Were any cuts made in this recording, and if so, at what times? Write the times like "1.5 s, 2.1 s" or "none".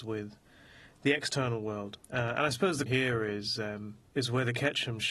2.0 s, 2.9 s, 4.1 s